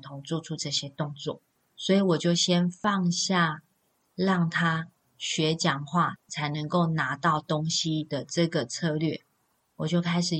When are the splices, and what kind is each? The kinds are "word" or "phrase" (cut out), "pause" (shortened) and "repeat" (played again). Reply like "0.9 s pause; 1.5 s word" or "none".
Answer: 1.6 s pause